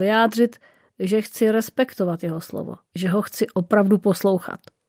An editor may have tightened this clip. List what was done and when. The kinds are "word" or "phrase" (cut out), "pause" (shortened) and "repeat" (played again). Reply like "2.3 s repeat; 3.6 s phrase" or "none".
2.8 s pause